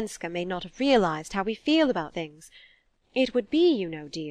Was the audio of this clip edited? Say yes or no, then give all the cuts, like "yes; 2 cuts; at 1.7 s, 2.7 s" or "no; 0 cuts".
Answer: yes; 1 cut; at 2.1 s